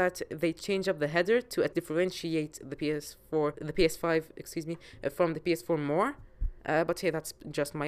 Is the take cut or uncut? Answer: cut